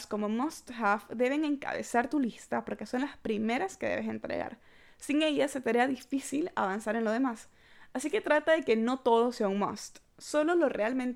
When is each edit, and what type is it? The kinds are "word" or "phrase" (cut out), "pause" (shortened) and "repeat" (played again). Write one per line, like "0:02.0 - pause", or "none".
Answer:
none